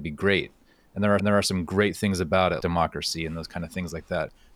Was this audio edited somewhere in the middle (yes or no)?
yes